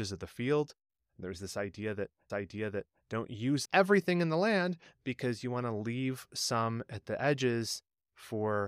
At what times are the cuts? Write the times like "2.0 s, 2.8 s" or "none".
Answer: 2.3 s, 3.6 s